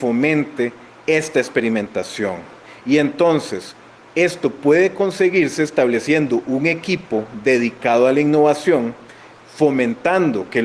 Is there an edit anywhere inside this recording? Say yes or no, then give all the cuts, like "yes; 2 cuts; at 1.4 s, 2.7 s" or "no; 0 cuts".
no; 0 cuts